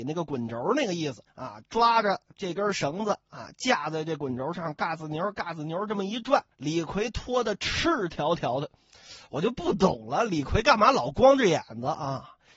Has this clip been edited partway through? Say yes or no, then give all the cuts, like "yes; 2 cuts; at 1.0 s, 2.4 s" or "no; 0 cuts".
yes; 3 cuts; at 1.3 s, 4.8 s, 6.5 s